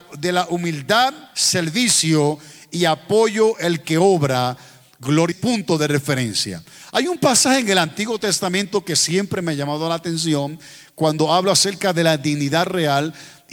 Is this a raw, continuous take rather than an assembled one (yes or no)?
no